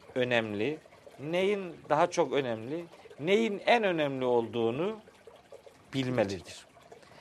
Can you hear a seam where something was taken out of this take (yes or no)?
no